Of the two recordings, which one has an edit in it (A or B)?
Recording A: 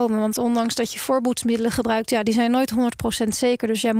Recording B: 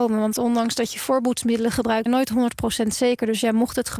B